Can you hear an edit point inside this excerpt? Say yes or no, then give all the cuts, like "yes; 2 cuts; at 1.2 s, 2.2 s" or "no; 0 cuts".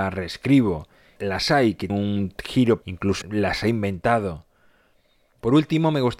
yes; 4 cuts; at 1.2 s, 1.9 s, 2.8 s, 3.2 s